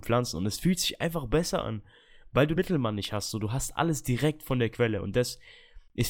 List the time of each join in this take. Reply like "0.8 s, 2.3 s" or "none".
2.6 s